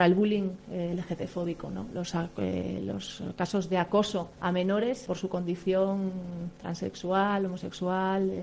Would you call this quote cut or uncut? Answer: cut